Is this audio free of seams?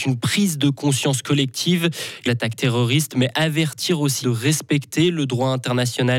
no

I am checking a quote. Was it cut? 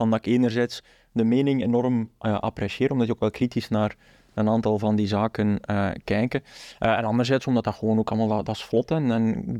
no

